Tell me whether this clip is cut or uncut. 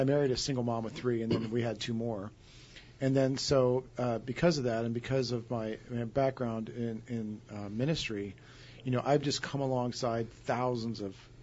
uncut